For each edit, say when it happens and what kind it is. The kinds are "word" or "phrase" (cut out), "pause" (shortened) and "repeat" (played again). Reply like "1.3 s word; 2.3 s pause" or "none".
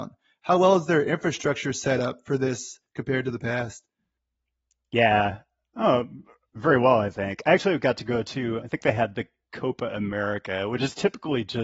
8.6 s word